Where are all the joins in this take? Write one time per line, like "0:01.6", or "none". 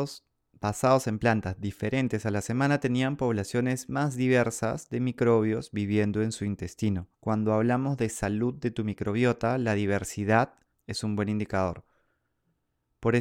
0:07.1
0:10.7